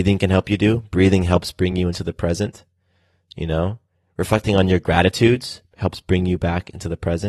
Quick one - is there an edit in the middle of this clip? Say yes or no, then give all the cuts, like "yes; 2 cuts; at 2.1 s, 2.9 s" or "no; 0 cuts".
no; 0 cuts